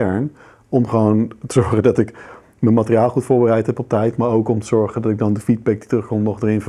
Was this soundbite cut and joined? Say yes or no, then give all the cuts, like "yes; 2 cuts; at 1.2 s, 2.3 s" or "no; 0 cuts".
no; 0 cuts